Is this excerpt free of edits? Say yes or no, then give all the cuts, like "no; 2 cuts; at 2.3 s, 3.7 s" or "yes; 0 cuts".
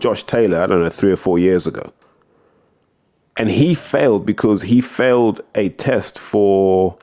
yes; 0 cuts